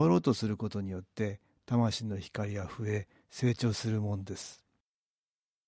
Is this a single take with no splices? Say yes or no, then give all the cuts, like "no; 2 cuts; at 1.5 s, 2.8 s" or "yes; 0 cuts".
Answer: yes; 0 cuts